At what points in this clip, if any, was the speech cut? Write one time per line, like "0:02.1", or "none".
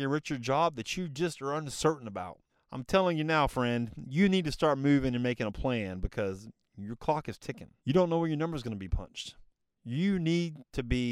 0:02.5
0:07.8